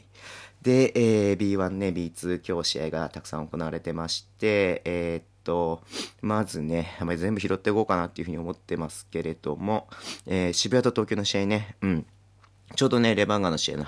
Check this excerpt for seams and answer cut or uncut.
uncut